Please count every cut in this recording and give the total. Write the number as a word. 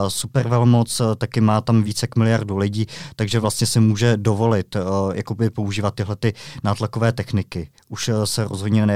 zero